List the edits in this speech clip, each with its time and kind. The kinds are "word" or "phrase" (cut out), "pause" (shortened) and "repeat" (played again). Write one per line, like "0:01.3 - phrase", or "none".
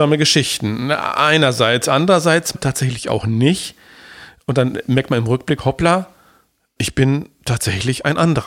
0:02.5 - word
0:06.8 - word